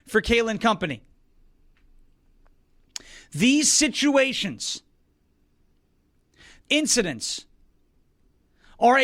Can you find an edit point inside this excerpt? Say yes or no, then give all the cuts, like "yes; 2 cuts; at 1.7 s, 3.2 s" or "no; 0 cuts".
yes; 1 cut; at 6.6 s